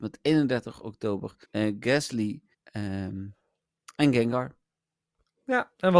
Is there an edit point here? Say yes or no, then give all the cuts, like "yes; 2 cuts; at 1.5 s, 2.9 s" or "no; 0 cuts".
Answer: yes; 2 cuts; at 1.4 s, 2.5 s